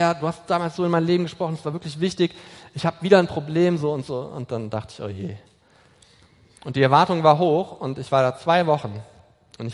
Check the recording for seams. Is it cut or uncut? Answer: uncut